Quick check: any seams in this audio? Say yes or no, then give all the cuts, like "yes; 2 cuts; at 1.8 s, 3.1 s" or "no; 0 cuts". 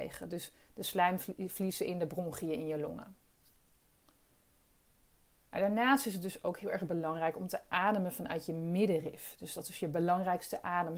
no; 0 cuts